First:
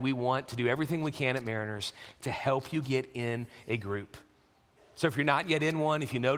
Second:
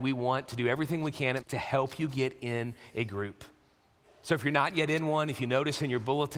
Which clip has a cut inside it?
second; 1 cut; at 1.4 s

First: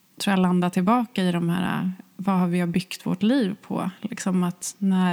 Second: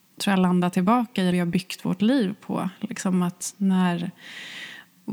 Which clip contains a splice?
second; 1 cut; at 1.3 s

